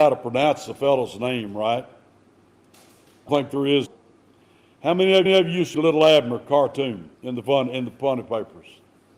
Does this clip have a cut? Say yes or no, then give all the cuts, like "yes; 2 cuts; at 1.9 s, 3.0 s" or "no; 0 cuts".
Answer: yes; 5 cuts; at 3.3 s, 3.9 s, 5.3 s, 5.7 s, 7.1 s